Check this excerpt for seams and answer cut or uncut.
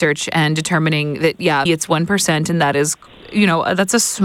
cut